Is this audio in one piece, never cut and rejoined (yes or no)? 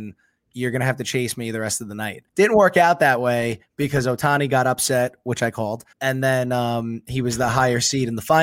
no